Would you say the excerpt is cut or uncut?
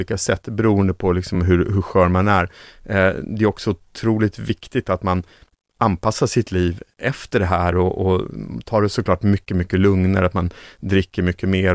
uncut